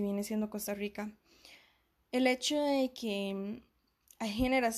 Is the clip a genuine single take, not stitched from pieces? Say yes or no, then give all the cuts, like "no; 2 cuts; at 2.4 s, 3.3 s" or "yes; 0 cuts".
yes; 0 cuts